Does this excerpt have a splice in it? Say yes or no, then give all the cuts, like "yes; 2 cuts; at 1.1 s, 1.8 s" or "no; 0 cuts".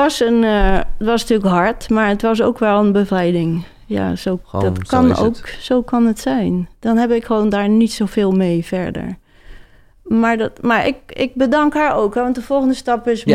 no; 0 cuts